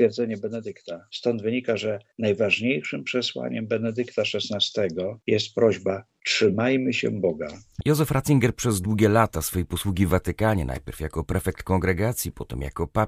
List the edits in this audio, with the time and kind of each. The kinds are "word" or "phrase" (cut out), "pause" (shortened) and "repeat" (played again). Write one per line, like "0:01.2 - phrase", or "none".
none